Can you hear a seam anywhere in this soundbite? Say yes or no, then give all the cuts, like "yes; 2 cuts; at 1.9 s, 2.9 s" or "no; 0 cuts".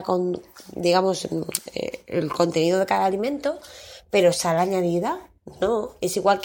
no; 0 cuts